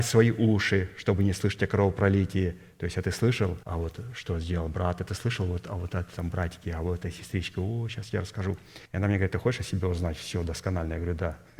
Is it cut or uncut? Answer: cut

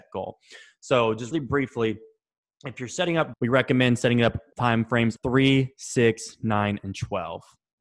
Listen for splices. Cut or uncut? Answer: cut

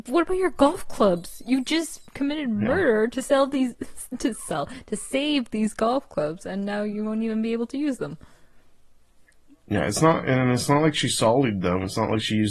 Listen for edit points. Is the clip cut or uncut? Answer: uncut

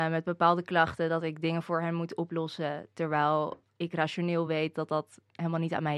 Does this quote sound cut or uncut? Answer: uncut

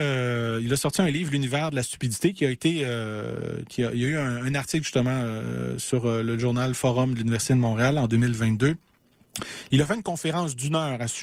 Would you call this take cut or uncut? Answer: uncut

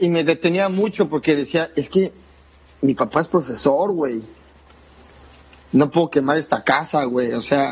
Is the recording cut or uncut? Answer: uncut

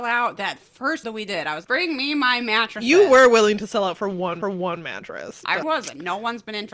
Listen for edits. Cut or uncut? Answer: cut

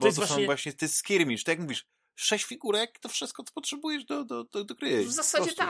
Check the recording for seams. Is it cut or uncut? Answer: uncut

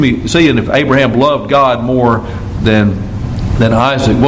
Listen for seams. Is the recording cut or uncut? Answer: uncut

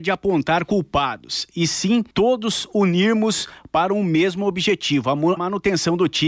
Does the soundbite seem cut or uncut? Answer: cut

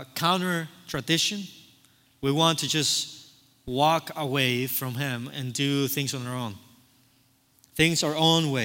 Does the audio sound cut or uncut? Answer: uncut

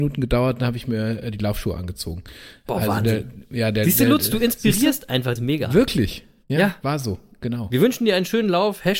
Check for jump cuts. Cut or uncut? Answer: cut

